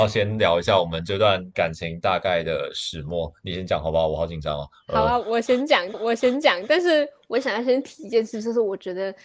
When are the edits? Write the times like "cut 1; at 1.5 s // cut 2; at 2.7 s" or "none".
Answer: cut 1; at 5.9 s